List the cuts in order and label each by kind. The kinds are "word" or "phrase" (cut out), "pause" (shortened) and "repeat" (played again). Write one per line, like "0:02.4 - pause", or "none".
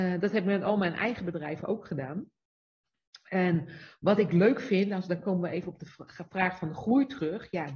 none